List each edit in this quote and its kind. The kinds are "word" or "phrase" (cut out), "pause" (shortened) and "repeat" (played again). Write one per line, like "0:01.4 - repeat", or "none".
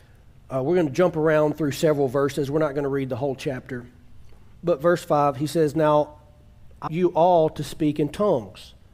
0:06.9 - word

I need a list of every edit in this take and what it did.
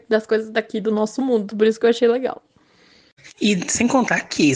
none

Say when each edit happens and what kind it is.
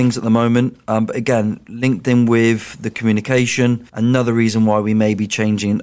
0:03.9 - pause

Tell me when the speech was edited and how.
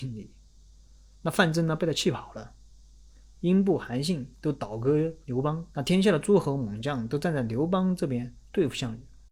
0:05.2 - pause
0:05.7 - pause

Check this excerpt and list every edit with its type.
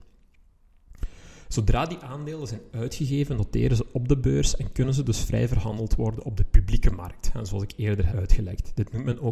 0:08.1 - word

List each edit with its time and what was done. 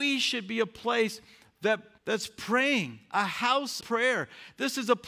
0:02.0 - pause
0:03.8 - word

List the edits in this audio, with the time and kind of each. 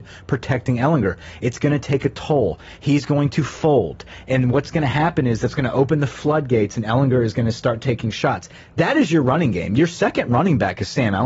none

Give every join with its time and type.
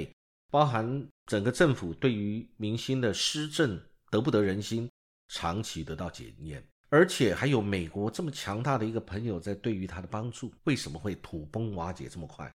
0:01.2 - pause
0:06.8 - pause
0:10.6 - pause

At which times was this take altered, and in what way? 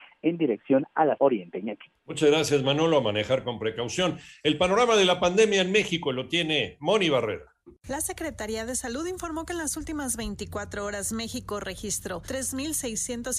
0:01.2 - word

